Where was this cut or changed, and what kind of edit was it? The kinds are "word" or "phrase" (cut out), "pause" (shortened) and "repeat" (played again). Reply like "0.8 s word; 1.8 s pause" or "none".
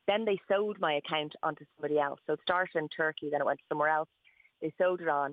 none